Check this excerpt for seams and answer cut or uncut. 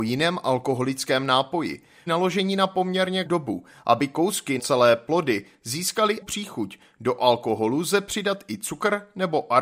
cut